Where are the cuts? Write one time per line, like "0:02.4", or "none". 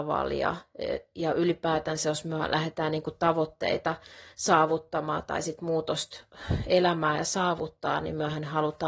none

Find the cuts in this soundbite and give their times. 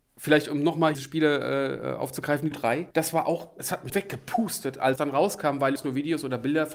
0:00.9
0:02.5
0:02.9
0:03.6
0:03.9
0:05.0
0:05.8

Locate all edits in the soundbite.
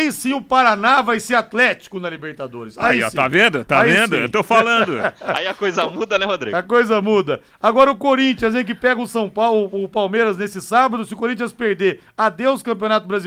none

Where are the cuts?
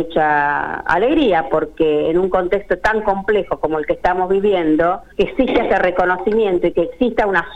0:05.1

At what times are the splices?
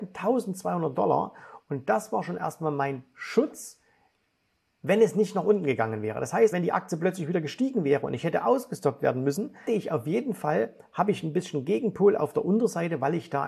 0:06.5
0:09.7

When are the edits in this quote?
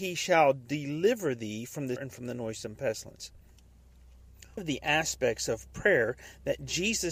0:02.0
0:04.6

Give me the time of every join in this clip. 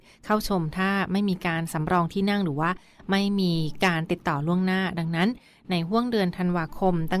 none

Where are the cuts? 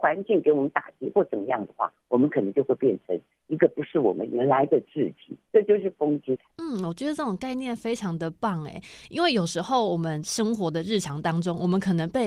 none

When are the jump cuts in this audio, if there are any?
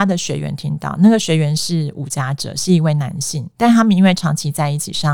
0:03.5

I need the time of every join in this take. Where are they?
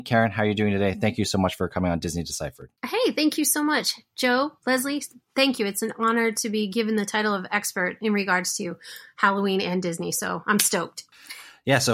0:02.7

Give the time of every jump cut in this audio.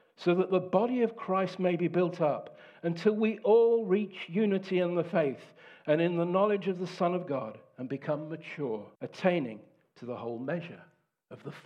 0:08.9

